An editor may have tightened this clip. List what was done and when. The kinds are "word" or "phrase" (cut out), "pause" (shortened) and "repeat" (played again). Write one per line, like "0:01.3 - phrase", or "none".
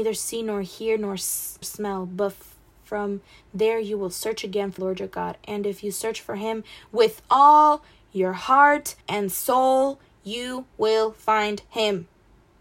0:01.6 - phrase
0:04.8 - word
0:09.0 - pause